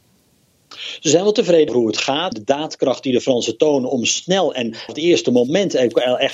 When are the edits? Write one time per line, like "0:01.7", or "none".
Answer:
0:01.7
0:02.3
0:04.9